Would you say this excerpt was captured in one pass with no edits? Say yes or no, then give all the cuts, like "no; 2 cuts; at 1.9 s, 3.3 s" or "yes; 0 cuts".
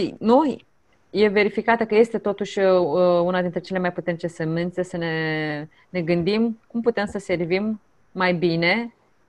yes; 0 cuts